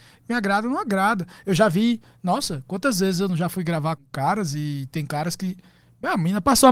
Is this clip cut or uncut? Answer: cut